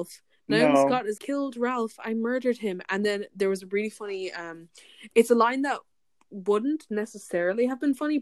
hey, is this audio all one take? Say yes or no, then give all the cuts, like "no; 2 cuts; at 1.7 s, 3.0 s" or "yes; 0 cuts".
no; 1 cut; at 1.2 s